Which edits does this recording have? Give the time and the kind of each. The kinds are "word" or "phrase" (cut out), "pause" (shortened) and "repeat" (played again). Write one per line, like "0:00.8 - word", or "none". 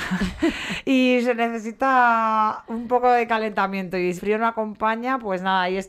0:04.2 - word